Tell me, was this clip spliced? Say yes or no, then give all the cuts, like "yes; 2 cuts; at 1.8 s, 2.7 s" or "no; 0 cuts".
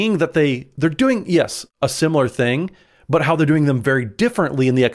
no; 0 cuts